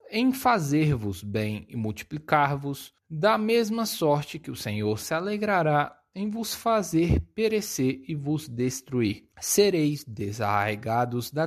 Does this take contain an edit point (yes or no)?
yes